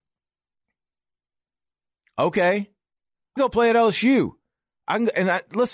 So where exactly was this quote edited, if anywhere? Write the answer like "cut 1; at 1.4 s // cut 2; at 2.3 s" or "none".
cut 1; at 3.4 s